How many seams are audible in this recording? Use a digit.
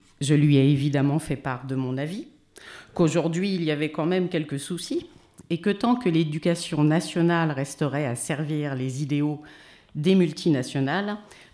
0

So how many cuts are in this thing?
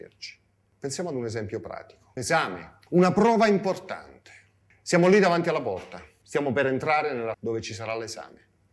2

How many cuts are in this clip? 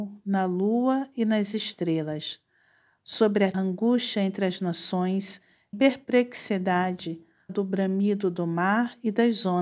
3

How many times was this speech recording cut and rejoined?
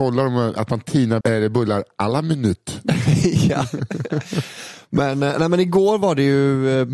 1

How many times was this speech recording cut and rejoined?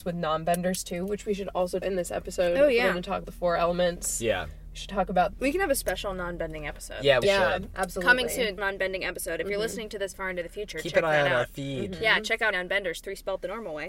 7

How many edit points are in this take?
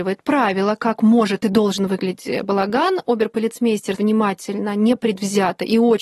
1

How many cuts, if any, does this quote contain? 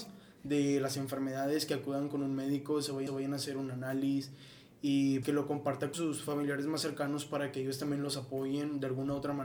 3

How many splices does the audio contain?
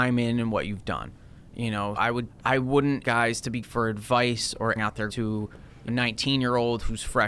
7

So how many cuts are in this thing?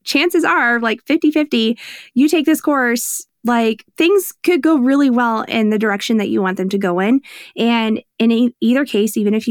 1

